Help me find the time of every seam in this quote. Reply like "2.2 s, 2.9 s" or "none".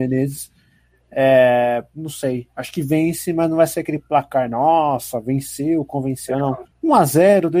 6.7 s